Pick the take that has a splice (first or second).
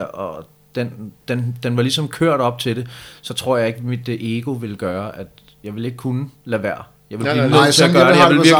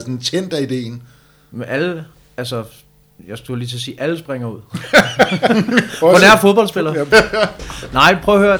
first